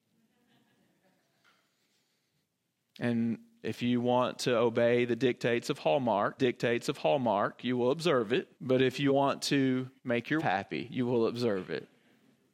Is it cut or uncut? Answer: cut